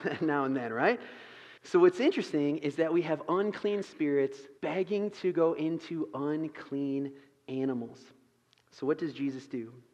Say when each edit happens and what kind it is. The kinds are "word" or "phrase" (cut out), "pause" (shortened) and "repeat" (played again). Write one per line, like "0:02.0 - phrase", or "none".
0:01.6 - pause
0:04.6 - pause